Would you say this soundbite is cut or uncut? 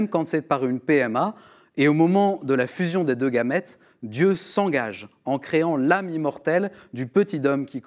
uncut